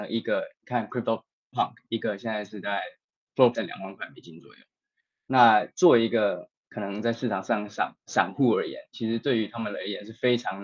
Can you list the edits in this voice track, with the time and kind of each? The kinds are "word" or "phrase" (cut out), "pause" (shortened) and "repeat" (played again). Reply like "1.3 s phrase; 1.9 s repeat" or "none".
1.5 s word; 3.5 s word